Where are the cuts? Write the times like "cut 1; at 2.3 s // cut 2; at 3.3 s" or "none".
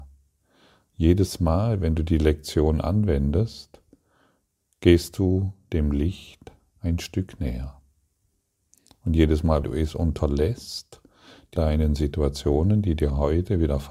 cut 1; at 9.6 s // cut 2; at 11.6 s

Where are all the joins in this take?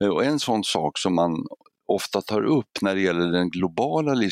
none

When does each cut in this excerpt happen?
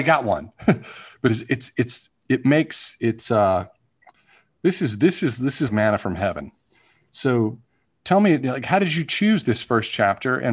cut 1; at 5.7 s

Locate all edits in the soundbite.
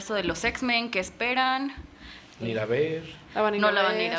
cut 1; at 2.4 s

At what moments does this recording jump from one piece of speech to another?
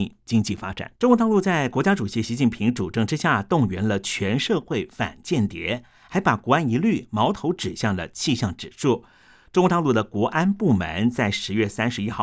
cut 1; at 1.0 s

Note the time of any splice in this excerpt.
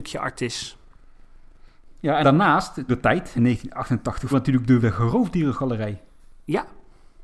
cut 1; at 2.2 s // cut 2; at 2.9 s // cut 3; at 3.4 s // cut 4; at 4.3 s // cut 5; at 4.8 s

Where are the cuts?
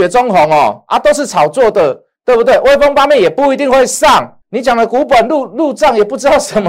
cut 1; at 2.2 s // cut 2; at 4.4 s

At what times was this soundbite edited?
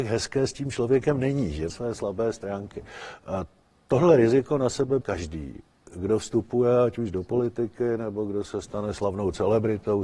cut 1; at 1.7 s // cut 2; at 5.0 s

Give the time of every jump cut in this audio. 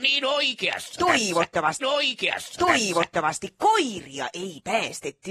cut 1; at 1.8 s

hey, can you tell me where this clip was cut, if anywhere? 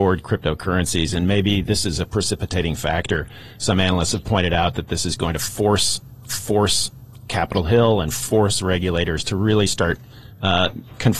cut 1; at 6.3 s

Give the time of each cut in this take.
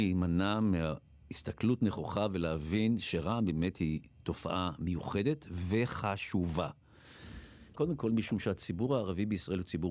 cut 1; at 1.2 s // cut 2; at 7.7 s

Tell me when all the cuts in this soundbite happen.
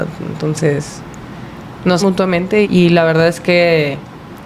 cut 1; at 2.0 s // cut 2; at 2.6 s

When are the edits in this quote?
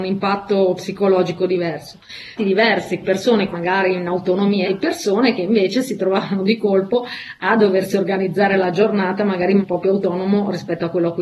cut 1; at 2.4 s // cut 2; at 3.0 s // cut 3; at 3.5 s // cut 4; at 4.6 s // cut 5; at 9.6 s

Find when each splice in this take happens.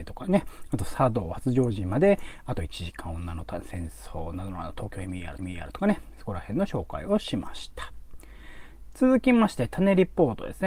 cut 1; at 5.4 s

